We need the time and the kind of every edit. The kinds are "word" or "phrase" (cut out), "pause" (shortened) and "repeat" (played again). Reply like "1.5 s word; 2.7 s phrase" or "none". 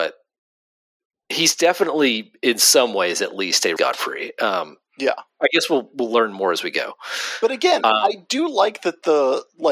3.8 s phrase